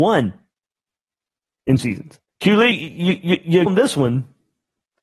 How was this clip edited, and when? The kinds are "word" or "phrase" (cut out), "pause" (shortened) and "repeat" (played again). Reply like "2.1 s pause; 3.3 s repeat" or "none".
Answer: 1.8 s word; 2.3 s pause; 2.7 s word; 3.7 s word